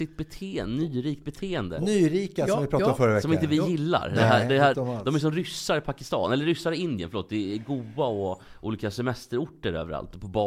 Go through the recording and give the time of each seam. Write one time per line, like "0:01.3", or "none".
0:04.7